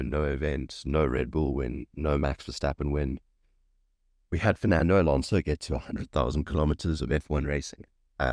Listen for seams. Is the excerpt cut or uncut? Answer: uncut